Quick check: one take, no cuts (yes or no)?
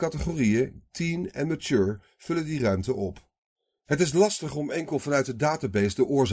yes